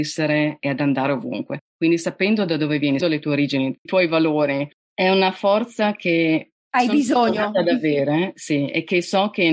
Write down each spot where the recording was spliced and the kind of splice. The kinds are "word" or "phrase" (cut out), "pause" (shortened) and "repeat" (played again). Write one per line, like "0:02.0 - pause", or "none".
0:03.0 - word
0:03.9 - word